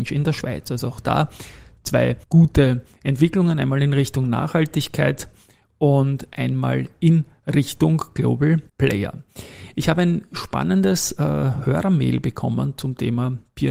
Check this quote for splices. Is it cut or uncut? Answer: cut